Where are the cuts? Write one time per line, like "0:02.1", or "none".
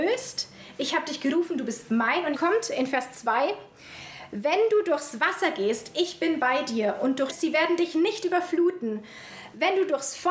0:02.3
0:07.3